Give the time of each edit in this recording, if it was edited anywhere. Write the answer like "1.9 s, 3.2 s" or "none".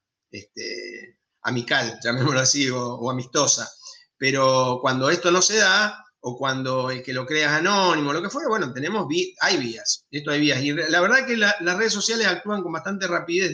none